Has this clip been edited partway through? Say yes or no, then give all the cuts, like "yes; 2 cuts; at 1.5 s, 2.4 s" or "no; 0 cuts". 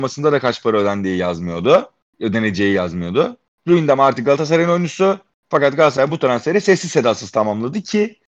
no; 0 cuts